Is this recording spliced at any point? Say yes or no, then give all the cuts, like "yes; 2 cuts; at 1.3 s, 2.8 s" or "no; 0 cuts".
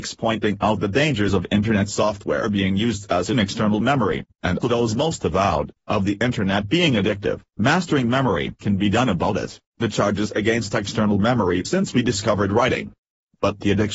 yes; 5 cuts; at 4.6 s, 7.5 s, 8.6 s, 9.7 s, 11.6 s